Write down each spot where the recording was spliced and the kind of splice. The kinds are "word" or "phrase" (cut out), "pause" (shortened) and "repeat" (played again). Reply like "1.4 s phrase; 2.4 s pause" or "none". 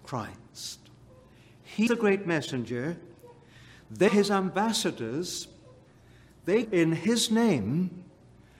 1.9 s word; 4.1 s word; 6.6 s word